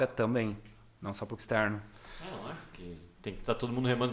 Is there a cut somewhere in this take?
yes; 1 cut; at 1.4 s

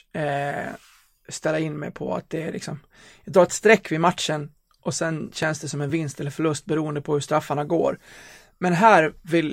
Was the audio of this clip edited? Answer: no; 0 cuts

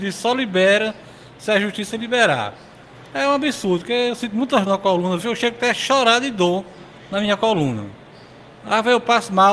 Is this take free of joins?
no; 1 cut; at 4.7 s

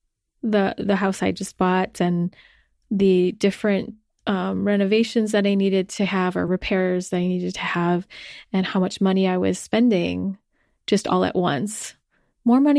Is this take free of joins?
yes; 0 cuts

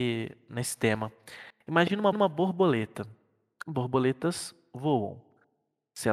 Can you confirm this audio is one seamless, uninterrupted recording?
no; 1 cut; at 2.1 s

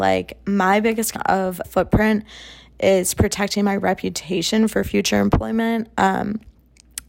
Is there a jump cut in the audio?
yes; 2 cuts; at 1.2 s, 1.6 s

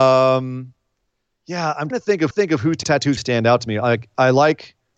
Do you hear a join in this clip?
yes; 4 cuts; at 1.9 s, 2.3 s, 2.8 s, 3.2 s

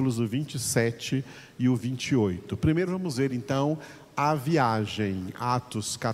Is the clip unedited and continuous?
yes; 0 cuts

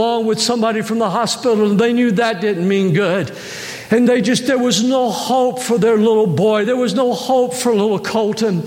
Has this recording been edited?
no; 0 cuts

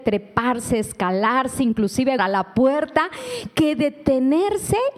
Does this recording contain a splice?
yes; 1 cut; at 2.2 s

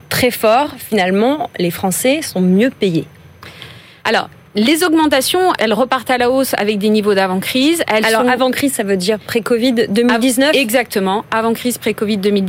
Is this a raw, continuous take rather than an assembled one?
no; 1 cut; at 5.6 s

